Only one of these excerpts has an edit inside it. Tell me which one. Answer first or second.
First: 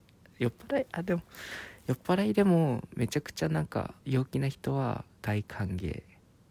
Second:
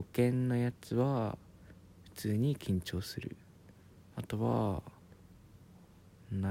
first